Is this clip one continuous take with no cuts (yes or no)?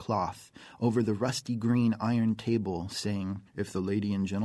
no